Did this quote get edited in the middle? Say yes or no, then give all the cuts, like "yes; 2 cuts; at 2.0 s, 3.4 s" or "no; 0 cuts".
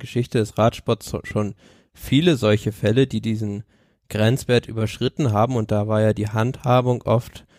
no; 0 cuts